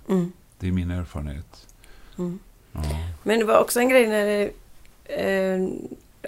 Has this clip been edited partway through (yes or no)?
no